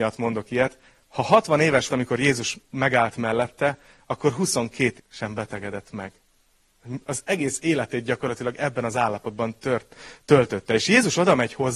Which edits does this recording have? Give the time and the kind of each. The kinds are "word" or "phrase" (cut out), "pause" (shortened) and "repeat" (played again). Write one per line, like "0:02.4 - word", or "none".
0:01.9 - word
0:05.0 - word